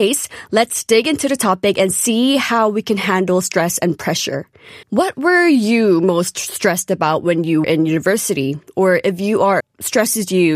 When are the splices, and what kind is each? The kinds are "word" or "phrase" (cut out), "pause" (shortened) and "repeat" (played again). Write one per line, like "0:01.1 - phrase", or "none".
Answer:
0:04.8 - pause
0:07.6 - word
0:09.6 - phrase

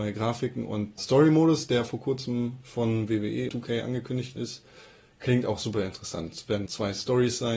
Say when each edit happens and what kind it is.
0:01.0 - word
0:03.5 - word
0:04.4 - word
0:06.7 - word

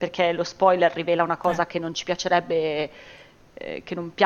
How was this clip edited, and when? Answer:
none

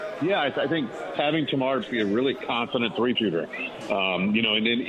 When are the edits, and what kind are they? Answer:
0:01.1 - word
0:01.8 - word
0:03.2 - word

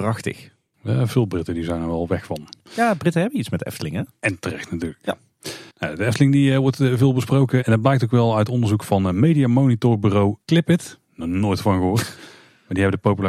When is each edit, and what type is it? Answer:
0:05.7 - pause
0:10.4 - pause

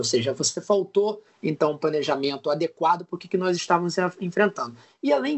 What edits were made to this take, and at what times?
none

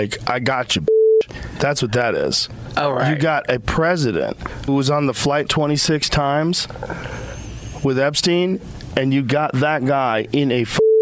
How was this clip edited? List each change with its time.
0:04.7 - word
0:05.5 - word

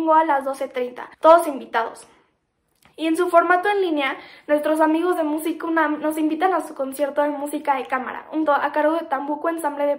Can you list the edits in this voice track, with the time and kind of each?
0:01.1 - pause
0:08.5 - word

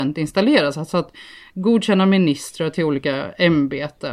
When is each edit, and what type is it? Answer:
none

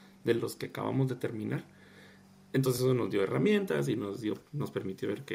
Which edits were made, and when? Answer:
none

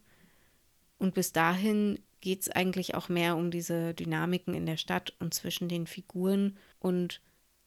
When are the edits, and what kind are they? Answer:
0:06.7 - pause

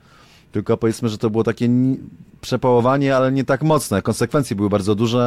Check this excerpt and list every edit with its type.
none

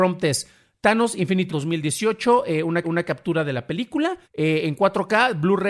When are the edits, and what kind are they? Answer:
0:01.5 - word
0:02.8 - repeat
0:04.2 - pause

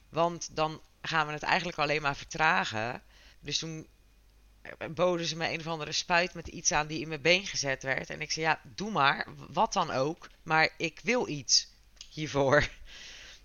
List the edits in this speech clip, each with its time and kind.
0:03.3 - pause
0:10.3 - pause

